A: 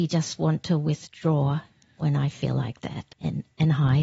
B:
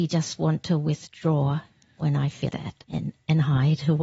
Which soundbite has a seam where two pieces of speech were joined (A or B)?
B